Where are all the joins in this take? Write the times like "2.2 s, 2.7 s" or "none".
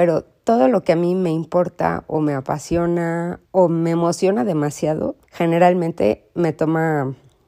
3.4 s, 5.2 s